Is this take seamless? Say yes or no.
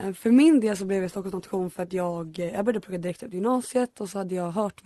yes